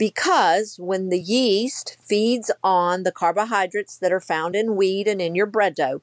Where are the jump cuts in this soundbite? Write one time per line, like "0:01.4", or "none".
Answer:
none